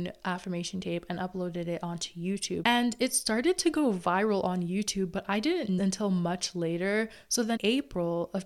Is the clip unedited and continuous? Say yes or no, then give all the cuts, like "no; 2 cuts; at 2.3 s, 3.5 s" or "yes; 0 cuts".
no; 2 cuts; at 5.8 s, 7.6 s